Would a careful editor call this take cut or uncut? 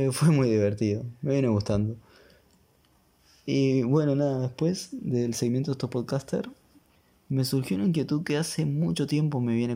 uncut